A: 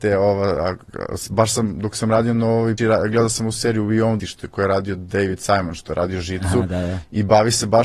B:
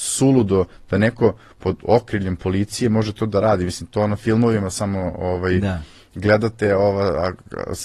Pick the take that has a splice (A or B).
A